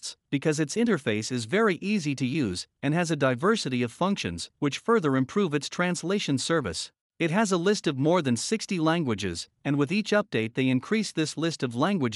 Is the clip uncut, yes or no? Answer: no